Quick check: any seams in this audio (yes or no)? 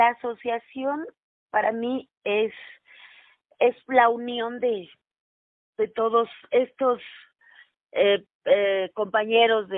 no